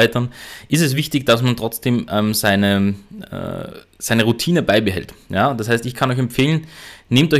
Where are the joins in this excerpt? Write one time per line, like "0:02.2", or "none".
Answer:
none